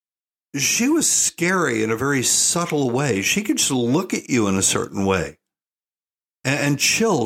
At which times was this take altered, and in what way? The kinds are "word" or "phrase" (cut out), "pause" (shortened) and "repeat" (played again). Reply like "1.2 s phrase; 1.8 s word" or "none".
none